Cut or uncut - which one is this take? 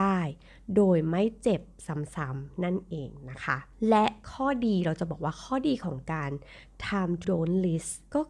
cut